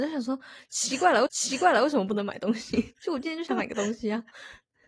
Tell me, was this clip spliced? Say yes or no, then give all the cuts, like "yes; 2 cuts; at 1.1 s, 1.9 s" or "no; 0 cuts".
yes; 1 cut; at 1.3 s